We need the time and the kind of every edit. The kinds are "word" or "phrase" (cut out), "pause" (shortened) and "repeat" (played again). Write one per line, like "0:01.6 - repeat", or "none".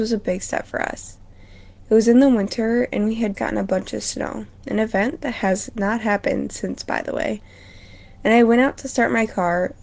0:03.3 - word
0:04.6 - pause

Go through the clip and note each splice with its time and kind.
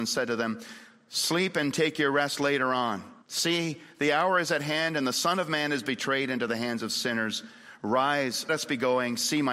0:03.2 - pause
0:08.5 - word

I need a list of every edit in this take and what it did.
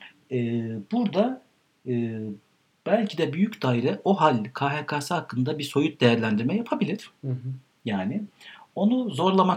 none

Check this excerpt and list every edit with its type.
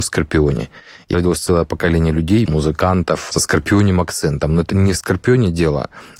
0:01.1 - phrase
0:02.5 - word
0:03.3 - phrase

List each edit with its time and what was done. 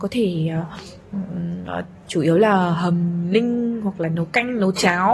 none

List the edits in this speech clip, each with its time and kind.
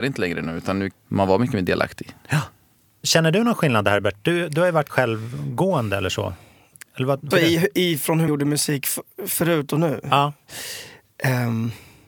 0:00.9 - word
0:04.9 - word
0:07.3 - word
0:08.3 - word

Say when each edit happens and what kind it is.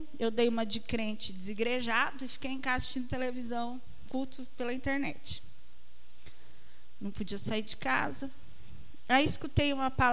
none

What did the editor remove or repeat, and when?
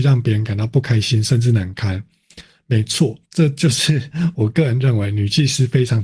0:03.2 - pause

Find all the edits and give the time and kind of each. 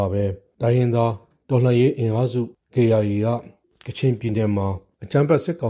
none

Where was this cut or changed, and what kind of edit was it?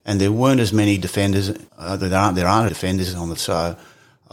0:01.7 - pause
0:02.7 - phrase
0:03.4 - word

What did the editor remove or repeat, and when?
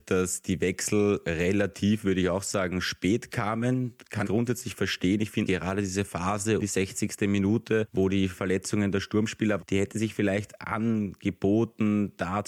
0:04.2 - word
0:05.5 - phrase
0:06.6 - word
0:09.6 - word

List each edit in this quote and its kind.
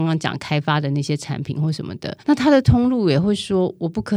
0:02.2 - pause

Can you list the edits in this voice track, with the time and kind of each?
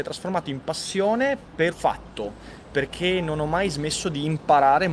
0:01.7 - word

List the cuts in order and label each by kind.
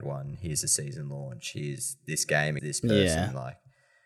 0:02.6 - word

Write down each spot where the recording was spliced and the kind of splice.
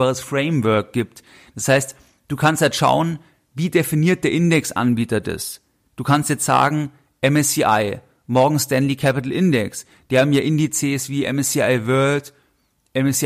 none

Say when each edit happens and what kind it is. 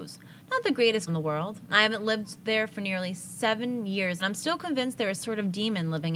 0:01.1 - word
0:04.2 - word
0:05.2 - word

